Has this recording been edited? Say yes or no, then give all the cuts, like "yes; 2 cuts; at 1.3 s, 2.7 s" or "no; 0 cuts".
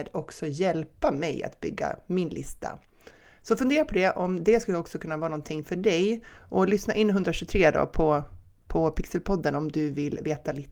no; 0 cuts